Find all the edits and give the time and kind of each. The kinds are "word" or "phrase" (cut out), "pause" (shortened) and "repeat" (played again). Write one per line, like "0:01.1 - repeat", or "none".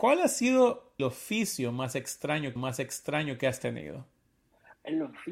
0:01.0 - word
0:02.6 - repeat